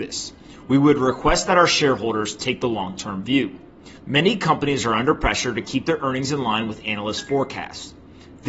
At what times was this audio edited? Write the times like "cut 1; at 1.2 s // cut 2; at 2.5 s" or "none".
cut 1; at 4.0 s